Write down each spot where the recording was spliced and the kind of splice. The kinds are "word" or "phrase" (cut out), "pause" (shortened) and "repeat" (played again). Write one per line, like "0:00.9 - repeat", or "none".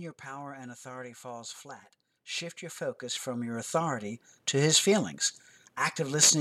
none

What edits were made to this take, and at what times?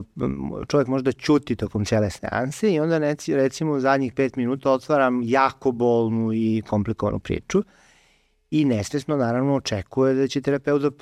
none

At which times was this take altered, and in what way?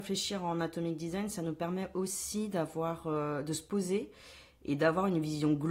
none

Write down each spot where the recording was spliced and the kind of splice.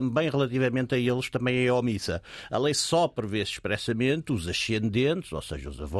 none

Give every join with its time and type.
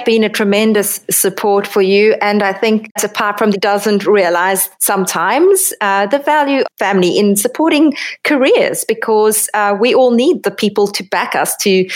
0:03.0 - word
0:03.5 - phrase
0:04.7 - pause
0:06.6 - phrase

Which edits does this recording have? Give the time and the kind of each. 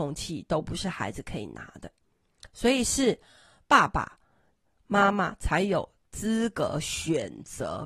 none

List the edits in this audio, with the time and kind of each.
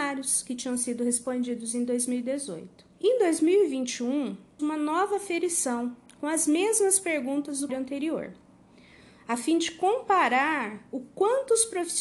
0:02.9 - pause
0:04.6 - phrase
0:07.7 - word

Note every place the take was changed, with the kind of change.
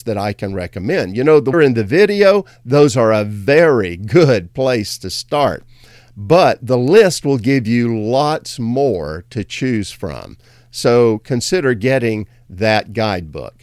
0:01.5 - phrase

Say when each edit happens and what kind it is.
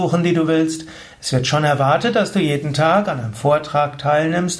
none

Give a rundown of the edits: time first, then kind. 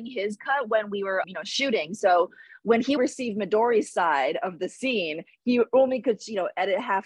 0:01.2 - word
0:03.0 - phrase

